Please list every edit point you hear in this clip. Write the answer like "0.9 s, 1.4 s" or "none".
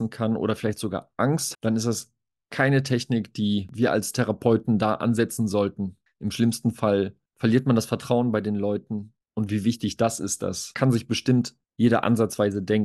1.5 s